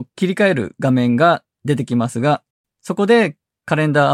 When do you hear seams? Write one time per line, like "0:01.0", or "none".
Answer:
0:02.5